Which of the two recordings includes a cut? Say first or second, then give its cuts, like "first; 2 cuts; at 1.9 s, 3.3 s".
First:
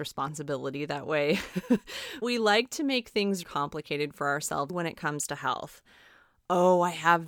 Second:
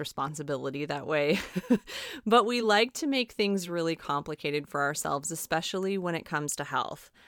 first; 3 cuts; at 2.2 s, 3.4 s, 4.7 s